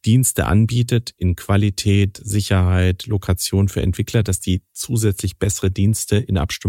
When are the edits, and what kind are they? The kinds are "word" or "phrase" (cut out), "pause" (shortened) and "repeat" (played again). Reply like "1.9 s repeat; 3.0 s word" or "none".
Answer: none